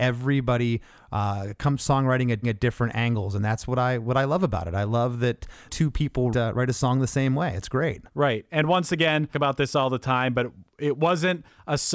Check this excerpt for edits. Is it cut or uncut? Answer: cut